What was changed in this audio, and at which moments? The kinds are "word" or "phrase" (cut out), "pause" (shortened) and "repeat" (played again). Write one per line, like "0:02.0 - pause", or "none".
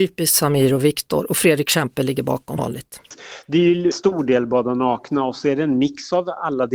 0:02.6 - word
0:03.9 - word